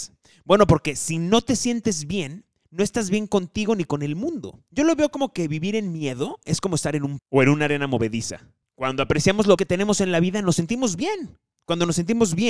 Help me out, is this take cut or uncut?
cut